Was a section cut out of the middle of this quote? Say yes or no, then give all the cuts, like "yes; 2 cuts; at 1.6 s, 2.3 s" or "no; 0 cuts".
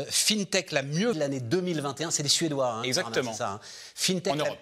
yes; 1 cut; at 1.1 s